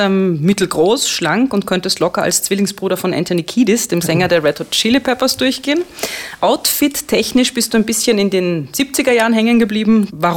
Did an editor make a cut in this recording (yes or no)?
no